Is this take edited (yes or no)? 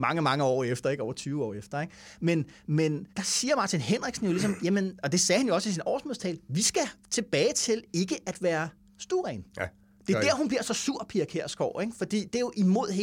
yes